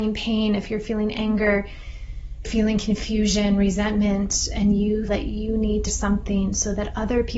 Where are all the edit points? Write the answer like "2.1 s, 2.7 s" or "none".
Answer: 2.4 s, 5.1 s, 5.9 s

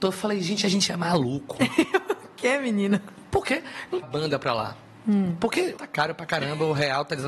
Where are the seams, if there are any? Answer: 4.0 s, 5.8 s

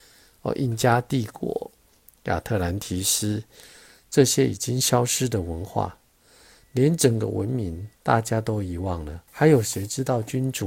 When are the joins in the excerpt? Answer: 7.9 s, 9.3 s

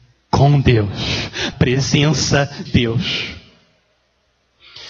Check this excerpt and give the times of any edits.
1.5 s, 2.7 s

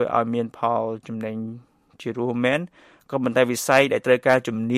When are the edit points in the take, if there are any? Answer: none

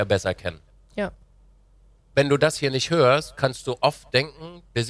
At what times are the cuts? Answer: none

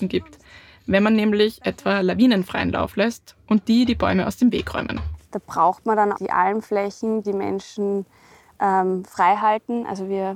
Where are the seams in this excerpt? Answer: 6.1 s, 7.2 s

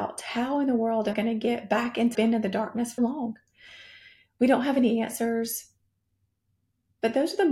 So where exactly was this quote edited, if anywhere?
1.1 s, 2.1 s, 3.0 s

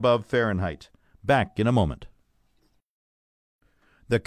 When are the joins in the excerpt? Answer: none

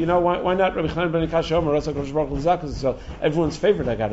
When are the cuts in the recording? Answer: none

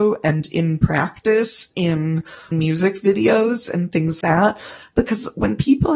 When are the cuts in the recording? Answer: 1.7 s, 2.5 s, 4.2 s

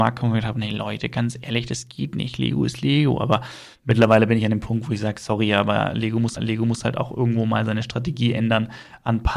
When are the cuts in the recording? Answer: 6.4 s

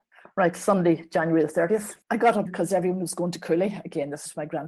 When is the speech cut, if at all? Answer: 2.0 s, 2.5 s

